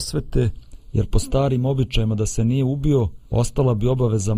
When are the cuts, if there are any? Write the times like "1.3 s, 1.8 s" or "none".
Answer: 3.3 s